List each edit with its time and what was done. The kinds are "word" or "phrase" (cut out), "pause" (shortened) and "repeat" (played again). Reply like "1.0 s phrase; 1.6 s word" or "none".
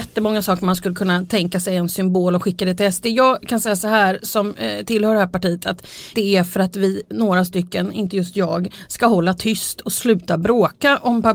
6.1 s phrase